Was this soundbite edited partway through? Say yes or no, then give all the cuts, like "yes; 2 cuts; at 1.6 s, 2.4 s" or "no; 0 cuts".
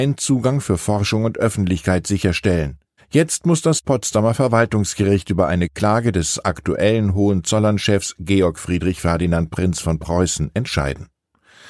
yes; 1 cut; at 3.0 s